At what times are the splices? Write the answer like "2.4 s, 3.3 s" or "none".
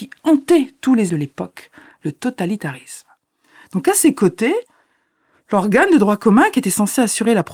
1.1 s